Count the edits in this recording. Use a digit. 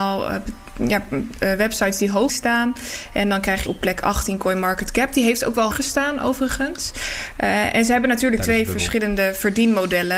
3